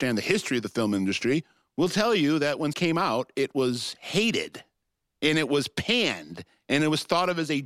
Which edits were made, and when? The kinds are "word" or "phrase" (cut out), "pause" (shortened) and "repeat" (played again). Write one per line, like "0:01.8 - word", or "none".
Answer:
0:02.7 - word